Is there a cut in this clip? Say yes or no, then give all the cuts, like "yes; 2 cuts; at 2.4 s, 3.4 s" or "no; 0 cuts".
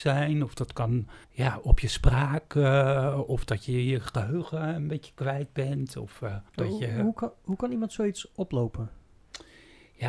yes; 2 cuts; at 1.2 s, 6.5 s